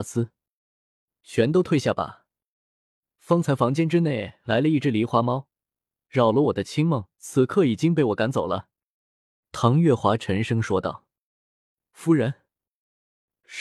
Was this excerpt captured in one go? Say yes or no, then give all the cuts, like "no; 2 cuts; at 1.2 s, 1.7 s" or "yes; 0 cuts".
no; 1 cut; at 7.1 s